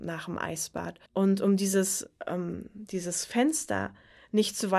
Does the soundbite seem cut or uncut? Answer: cut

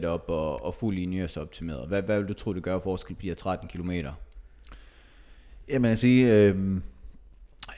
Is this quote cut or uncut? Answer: uncut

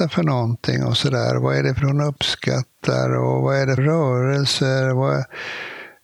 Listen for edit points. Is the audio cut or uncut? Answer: cut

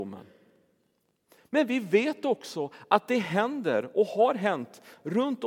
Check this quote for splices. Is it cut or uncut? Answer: uncut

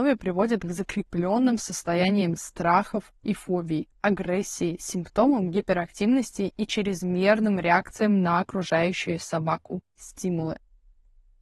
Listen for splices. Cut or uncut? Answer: uncut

